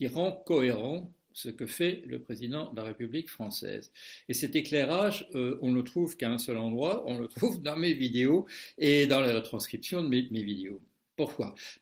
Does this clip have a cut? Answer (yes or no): no